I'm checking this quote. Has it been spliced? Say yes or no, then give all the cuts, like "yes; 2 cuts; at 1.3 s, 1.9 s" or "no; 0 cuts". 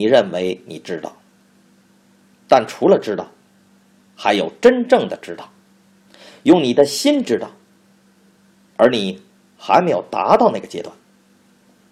no; 0 cuts